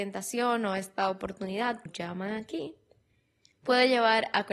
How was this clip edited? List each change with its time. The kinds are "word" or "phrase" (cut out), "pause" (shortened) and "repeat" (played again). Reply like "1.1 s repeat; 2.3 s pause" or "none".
1.9 s word